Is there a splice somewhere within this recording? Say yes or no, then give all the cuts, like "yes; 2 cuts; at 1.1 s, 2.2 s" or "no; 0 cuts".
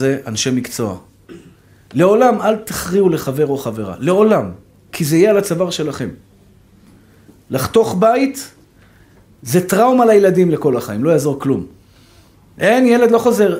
no; 0 cuts